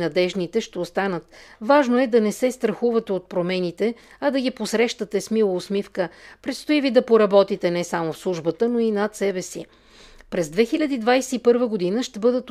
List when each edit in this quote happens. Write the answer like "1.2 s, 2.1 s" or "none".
none